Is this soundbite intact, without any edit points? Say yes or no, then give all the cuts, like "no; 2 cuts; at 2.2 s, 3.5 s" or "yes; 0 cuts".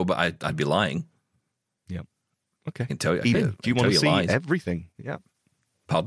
no; 1 cut; at 3.3 s